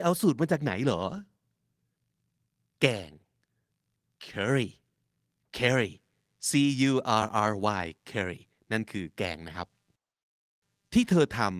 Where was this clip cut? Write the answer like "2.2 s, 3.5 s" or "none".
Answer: none